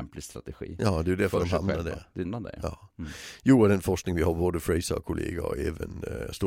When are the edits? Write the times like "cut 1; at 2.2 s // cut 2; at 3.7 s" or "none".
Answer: cut 1; at 2.2 s